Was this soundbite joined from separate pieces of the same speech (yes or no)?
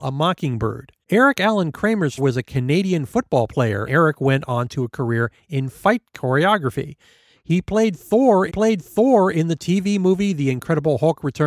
yes